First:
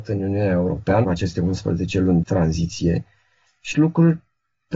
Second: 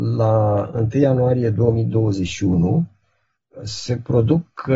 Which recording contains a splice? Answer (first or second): first